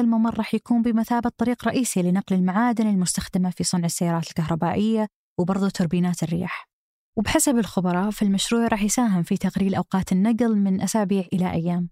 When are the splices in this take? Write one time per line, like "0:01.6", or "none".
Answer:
none